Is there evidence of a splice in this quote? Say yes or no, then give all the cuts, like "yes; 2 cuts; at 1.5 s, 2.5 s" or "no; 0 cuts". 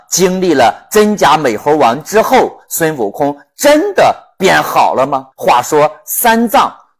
yes; 1 cut; at 5.3 s